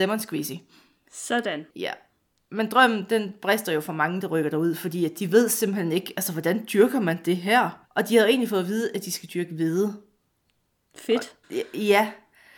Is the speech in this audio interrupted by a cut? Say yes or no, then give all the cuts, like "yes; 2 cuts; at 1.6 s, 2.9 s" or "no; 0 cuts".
yes; 3 cuts; at 1.7 s, 7.8 s, 11.4 s